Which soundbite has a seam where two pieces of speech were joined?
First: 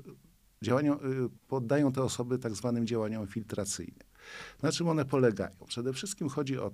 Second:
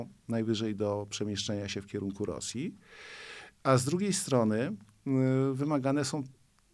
first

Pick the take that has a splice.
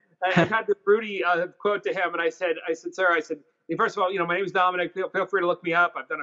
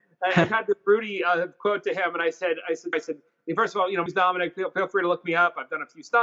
second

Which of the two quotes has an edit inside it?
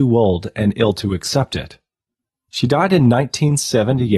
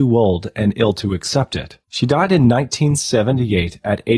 second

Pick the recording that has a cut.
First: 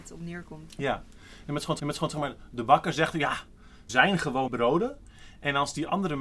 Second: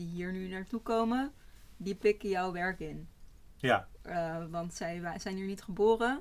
first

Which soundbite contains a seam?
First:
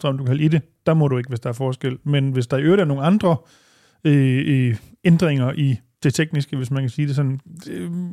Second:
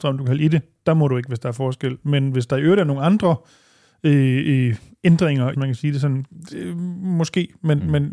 second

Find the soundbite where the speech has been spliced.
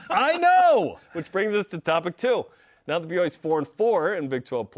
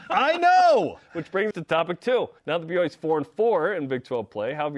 second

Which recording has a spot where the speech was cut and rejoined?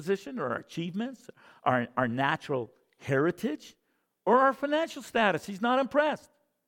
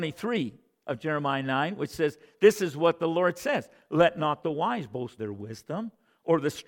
second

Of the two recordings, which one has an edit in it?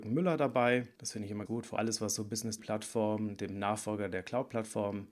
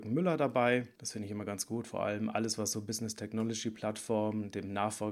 first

